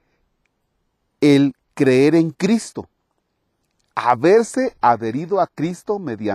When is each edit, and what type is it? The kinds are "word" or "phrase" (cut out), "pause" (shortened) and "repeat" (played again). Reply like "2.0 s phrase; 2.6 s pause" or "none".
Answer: none